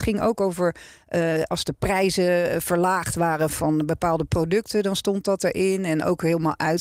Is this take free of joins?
no; 1 cut; at 3.5 s

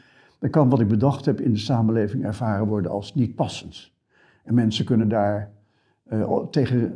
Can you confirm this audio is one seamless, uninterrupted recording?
yes; 0 cuts

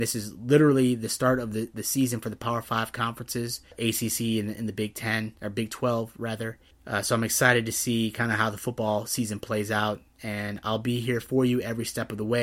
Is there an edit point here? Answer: no; 0 cuts

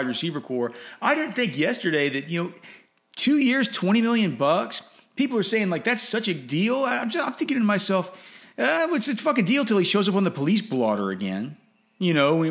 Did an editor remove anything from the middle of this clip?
no; 0 cuts

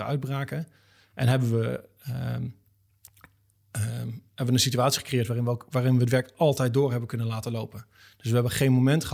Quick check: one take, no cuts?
yes; 0 cuts

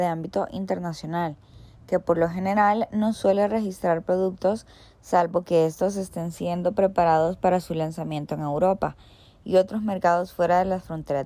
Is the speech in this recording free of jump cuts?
yes; 0 cuts

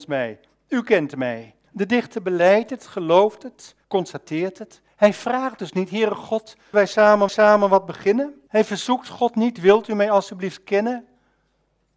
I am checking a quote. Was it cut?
yes; 6 cuts; at 1.6 s, 3.8 s, 4.9 s, 6.7 s, 7.3 s, 8.5 s

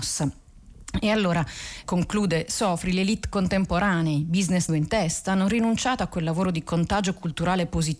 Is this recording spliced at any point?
yes; 2 cuts; at 1.8 s, 4.7 s

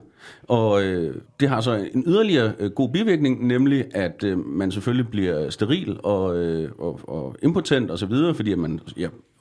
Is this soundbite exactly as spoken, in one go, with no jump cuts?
no; 1 cut; at 1.3 s

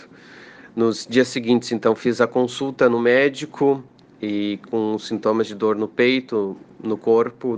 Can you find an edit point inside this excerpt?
no; 0 cuts

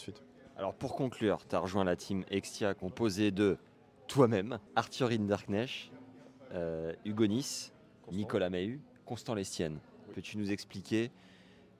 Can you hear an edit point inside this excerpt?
no; 0 cuts

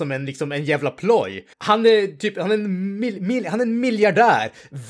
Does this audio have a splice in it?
yes; 1 cut; at 1.5 s

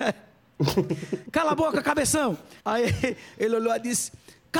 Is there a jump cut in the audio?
yes; 1 cut; at 2.6 s

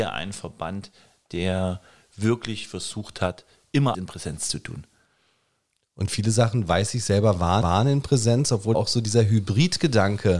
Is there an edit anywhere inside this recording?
yes; 3 cuts; at 3.9 s, 7.6 s, 8.7 s

